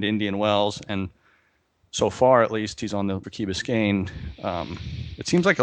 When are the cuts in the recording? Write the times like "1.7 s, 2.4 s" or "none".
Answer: 3.2 s